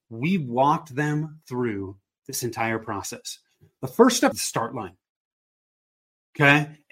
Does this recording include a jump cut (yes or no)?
yes